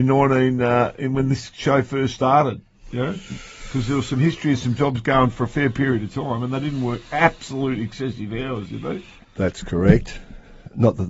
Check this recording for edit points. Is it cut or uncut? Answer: uncut